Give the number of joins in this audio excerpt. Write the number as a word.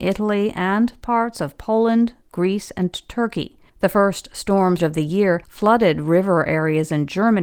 three